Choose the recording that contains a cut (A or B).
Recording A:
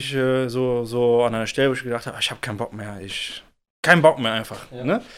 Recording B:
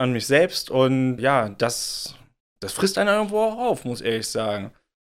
B